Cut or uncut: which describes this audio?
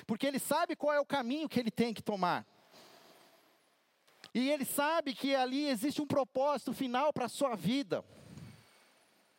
cut